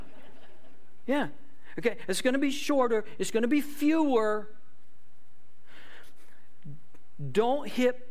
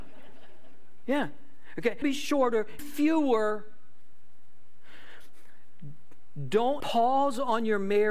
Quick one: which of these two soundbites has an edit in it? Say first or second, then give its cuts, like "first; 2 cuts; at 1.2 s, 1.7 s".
second; 3 cuts; at 2.0 s, 2.8 s, 6.8 s